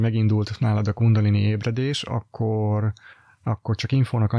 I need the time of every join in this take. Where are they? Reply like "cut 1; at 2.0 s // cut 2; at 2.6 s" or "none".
none